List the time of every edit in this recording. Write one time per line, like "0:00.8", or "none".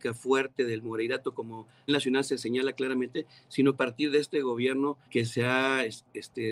0:01.9
0:03.8
0:05.0